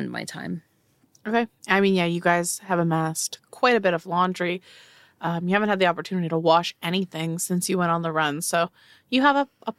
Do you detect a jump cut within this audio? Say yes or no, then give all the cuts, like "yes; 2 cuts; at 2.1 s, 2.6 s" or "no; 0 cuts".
no; 0 cuts